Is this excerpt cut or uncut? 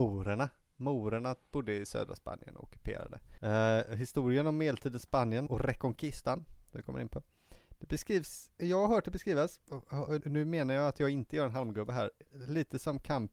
cut